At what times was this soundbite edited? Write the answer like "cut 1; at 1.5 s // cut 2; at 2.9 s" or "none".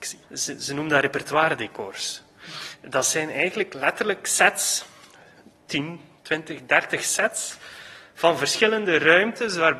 none